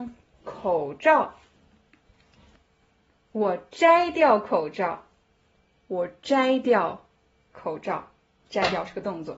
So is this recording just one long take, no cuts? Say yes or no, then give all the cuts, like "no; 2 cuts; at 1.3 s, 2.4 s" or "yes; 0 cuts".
yes; 0 cuts